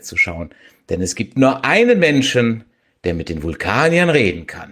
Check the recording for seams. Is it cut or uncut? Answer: uncut